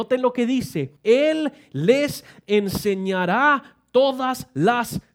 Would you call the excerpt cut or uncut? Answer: cut